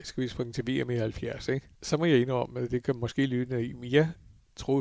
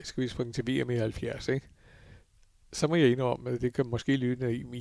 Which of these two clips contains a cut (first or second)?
first